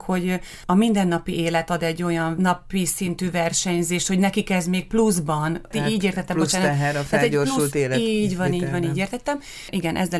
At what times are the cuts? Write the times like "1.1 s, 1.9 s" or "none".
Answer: none